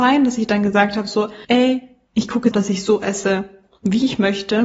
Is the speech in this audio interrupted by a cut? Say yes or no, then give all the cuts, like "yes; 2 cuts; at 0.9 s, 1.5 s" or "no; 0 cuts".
yes; 2 cuts; at 1.4 s, 2.5 s